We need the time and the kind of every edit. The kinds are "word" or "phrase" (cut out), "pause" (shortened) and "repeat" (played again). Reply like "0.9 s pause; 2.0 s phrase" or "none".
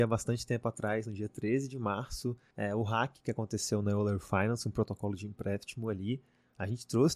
none